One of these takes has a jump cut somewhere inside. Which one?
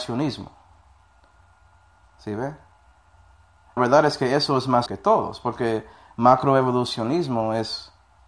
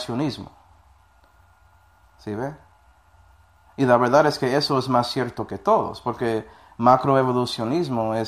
first; 2 cuts; at 3.8 s, 4.9 s

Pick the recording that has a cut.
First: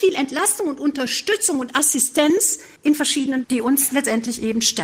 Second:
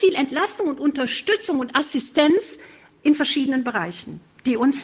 first; 2 cuts; at 2.8 s, 3.4 s

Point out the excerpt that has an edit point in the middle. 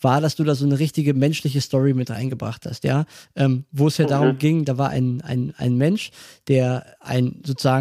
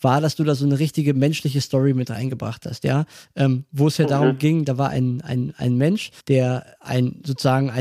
second; 1 cut; at 6.2 s

